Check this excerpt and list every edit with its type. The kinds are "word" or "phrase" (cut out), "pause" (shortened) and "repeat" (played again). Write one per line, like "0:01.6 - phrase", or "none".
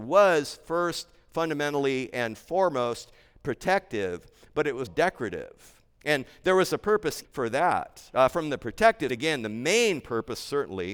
0:04.9 - word
0:07.2 - word
0:09.1 - word